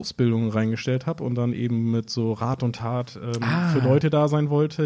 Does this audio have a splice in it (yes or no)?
no